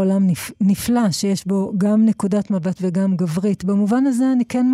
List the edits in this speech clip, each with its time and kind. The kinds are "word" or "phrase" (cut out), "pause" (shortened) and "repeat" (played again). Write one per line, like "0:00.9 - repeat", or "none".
0:02.7 - word